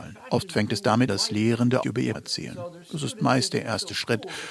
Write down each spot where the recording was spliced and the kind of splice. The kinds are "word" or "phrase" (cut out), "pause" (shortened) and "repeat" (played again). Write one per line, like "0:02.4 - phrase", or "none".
0:01.1 - word
0:01.8 - word
0:02.1 - word